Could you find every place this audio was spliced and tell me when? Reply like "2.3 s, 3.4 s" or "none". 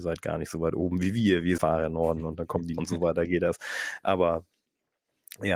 1.6 s, 2.8 s